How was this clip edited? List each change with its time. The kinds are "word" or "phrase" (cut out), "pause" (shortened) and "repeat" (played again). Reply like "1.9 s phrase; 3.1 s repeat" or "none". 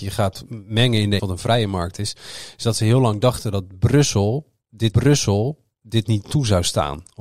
1.2 s word; 4.9 s repeat